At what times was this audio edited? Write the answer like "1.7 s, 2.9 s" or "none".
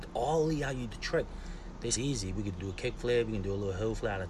0.9 s, 2.0 s